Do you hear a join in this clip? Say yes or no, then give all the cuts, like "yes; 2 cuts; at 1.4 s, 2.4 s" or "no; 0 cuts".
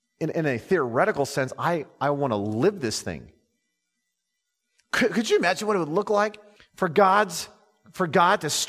yes; 1 cut; at 6.6 s